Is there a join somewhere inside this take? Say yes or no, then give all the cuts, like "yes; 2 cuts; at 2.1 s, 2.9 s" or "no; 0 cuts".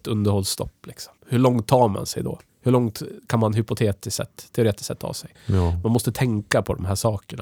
yes; 3 cuts; at 1.2 s, 2.5 s, 5.3 s